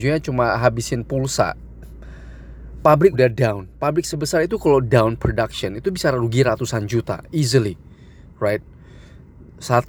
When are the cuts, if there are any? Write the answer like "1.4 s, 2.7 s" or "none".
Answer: 3.1 s